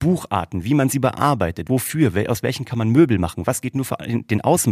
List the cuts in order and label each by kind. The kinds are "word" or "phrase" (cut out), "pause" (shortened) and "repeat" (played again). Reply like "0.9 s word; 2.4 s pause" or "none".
1.7 s word